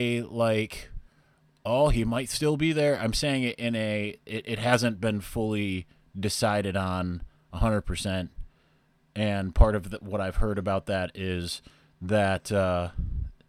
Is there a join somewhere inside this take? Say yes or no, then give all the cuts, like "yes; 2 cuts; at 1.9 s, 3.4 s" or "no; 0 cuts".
no; 0 cuts